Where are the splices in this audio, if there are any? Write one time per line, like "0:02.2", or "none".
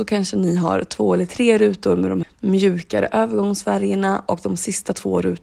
0:02.2